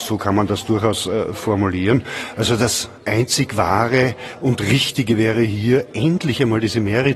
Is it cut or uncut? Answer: cut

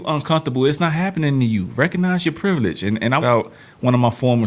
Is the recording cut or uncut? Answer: cut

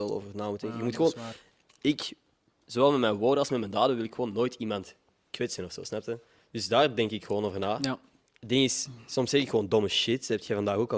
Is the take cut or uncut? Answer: uncut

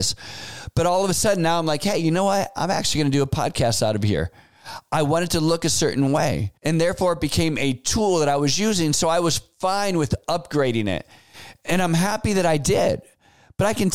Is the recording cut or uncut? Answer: cut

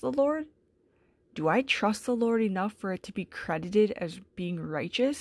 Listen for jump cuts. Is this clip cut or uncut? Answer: uncut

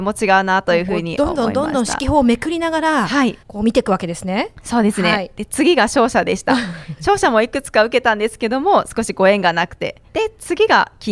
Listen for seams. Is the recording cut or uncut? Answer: cut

